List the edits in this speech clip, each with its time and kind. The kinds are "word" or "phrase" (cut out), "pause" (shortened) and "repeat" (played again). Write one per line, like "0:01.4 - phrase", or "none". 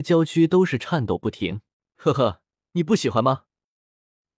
0:01.7 - pause